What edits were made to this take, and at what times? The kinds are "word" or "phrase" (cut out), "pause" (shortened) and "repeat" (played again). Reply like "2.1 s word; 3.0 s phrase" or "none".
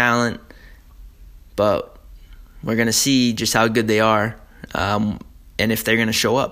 none